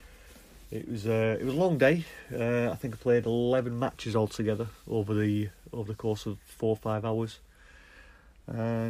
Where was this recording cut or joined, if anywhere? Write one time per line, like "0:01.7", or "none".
none